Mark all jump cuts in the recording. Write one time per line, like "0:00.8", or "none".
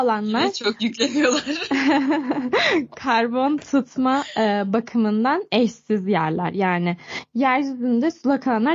none